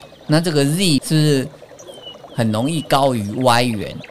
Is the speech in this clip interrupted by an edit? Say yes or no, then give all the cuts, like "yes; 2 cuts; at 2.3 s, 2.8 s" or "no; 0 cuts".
yes; 1 cut; at 1.0 s